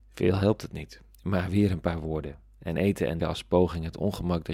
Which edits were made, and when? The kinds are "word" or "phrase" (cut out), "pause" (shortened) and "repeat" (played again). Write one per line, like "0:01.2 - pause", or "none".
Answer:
0:03.2 - word